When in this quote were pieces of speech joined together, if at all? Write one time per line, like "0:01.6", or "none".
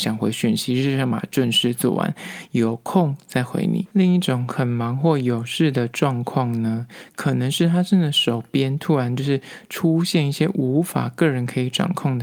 0:03.9